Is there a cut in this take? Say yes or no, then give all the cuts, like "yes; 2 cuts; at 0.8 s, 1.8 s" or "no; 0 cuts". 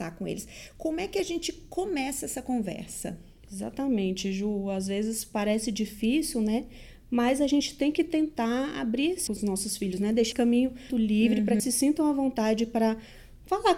yes; 4 cuts; at 9.3 s, 10.3 s, 10.9 s, 11.6 s